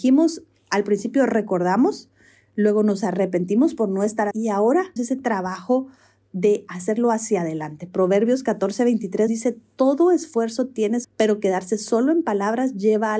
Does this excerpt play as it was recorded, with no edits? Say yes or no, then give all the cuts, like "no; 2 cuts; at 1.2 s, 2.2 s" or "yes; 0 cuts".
no; 4 cuts; at 4.3 s, 5.0 s, 9.3 s, 11.0 s